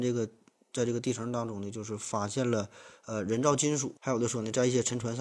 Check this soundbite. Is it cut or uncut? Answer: cut